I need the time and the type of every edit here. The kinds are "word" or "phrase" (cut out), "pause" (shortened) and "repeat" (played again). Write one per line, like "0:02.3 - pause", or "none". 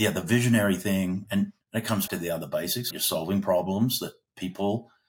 0:01.6 - pause
0:02.1 - word
0:02.9 - word